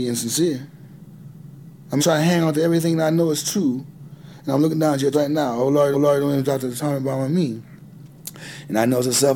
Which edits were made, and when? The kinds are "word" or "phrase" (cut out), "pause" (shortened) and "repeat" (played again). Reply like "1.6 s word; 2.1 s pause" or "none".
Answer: 2.0 s word; 5.1 s word; 5.9 s repeat